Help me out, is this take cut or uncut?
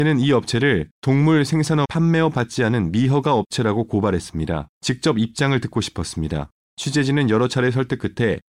cut